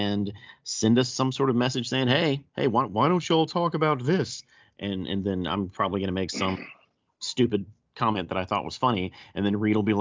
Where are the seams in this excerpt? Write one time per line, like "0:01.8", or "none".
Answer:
0:02.5